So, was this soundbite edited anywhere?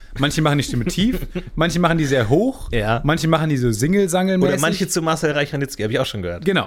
no; 0 cuts

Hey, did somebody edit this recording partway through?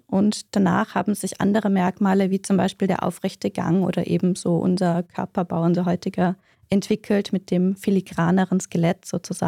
no; 0 cuts

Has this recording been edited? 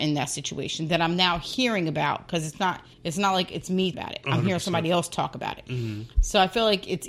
yes; 2 cuts; at 2.9 s, 3.9 s

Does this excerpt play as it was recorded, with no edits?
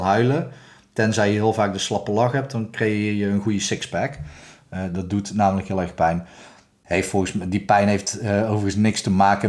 yes; 0 cuts

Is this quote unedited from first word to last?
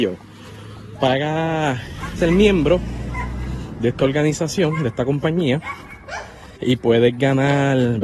no; 2 cuts; at 2.2 s, 6.6 s

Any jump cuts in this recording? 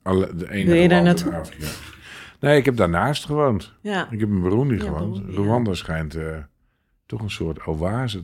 no; 0 cuts

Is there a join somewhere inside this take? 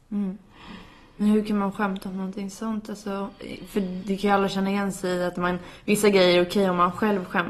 no; 0 cuts

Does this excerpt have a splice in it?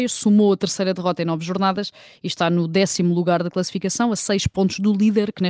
no; 0 cuts

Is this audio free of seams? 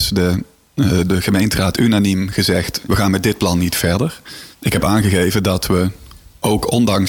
no; 3 cuts; at 1.1 s, 2.9 s, 4.5 s

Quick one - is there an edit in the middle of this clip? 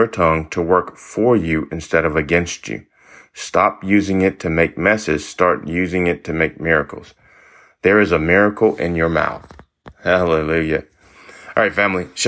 no; 0 cuts

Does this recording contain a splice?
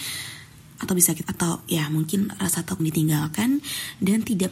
yes; 2 cuts; at 1.2 s, 2.8 s

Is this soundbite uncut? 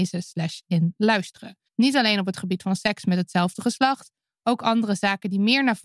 no; 1 cut; at 1.7 s

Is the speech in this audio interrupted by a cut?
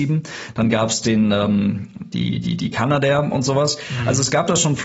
no; 0 cuts

